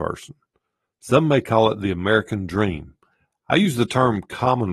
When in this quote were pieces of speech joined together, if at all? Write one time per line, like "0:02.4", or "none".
none